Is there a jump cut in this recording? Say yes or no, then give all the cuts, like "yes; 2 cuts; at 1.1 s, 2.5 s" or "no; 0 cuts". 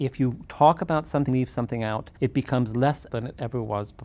yes; 3 cuts; at 1.3 s, 2.2 s, 3.1 s